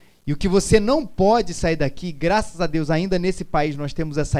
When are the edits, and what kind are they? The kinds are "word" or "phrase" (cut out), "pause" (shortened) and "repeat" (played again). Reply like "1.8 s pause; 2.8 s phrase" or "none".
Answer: none